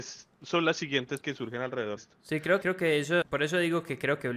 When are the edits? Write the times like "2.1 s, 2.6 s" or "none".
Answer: 1.2 s, 2.0 s, 2.6 s, 3.2 s